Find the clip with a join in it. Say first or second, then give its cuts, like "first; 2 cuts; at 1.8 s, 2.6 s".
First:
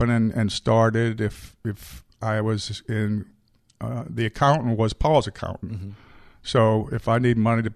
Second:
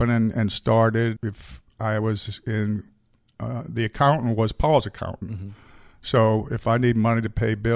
second; 1 cut; at 1.2 s